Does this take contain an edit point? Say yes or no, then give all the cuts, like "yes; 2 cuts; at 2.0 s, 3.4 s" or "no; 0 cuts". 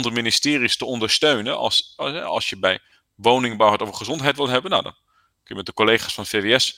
no; 0 cuts